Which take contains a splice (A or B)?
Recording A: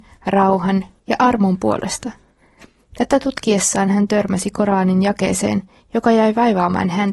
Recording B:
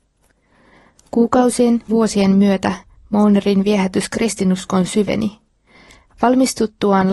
B